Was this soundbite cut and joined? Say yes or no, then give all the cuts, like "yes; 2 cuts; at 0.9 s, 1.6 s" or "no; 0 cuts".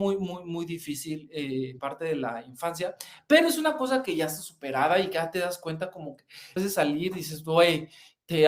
yes; 2 cuts; at 1.8 s, 6.6 s